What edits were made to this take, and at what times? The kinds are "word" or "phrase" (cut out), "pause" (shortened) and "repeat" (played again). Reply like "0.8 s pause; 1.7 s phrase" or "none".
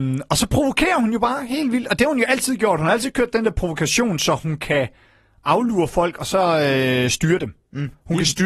none